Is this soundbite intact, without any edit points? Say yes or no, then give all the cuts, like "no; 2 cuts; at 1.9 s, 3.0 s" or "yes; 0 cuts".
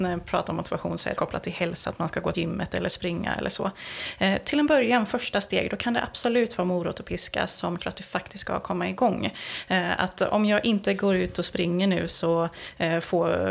no; 3 cuts; at 1.2 s, 2.3 s, 7.8 s